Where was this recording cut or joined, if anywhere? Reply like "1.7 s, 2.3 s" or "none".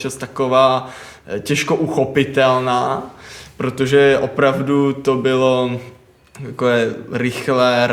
none